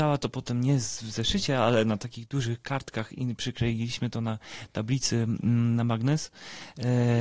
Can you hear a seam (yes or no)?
no